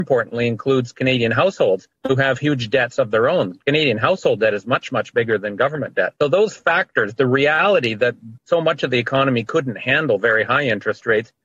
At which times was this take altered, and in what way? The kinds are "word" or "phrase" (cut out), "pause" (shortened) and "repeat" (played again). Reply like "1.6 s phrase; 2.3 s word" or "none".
2.0 s pause; 6.2 s pause; 8.4 s pause